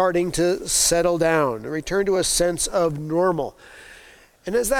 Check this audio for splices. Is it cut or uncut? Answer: uncut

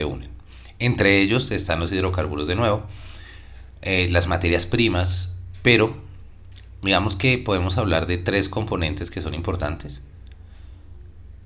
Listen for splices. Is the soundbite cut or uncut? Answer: uncut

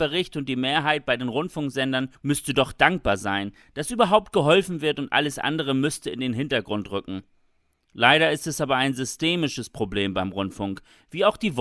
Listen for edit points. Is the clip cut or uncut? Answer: cut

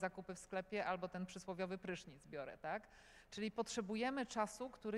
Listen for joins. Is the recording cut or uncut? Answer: uncut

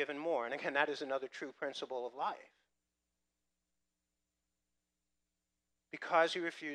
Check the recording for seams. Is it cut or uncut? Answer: uncut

